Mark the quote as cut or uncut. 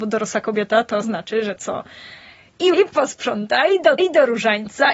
cut